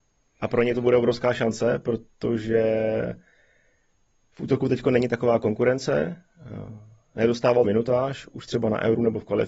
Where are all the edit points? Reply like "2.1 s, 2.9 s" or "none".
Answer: 7.6 s